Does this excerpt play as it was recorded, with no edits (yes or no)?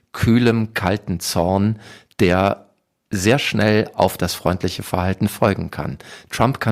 yes